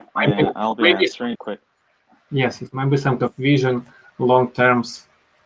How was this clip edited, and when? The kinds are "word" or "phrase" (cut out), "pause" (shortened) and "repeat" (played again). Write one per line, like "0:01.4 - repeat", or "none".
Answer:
0:01.3 - word
0:03.2 - word